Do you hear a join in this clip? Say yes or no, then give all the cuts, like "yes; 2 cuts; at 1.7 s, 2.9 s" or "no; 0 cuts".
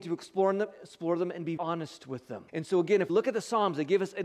yes; 3 cuts; at 1.6 s, 2.5 s, 3.1 s